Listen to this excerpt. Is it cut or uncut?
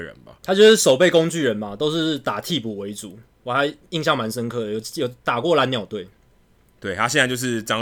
uncut